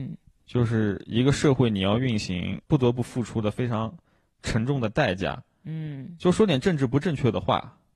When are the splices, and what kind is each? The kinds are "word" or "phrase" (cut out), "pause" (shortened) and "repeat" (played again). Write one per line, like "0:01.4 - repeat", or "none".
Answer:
none